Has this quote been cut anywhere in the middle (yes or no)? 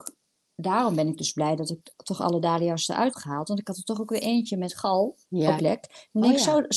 yes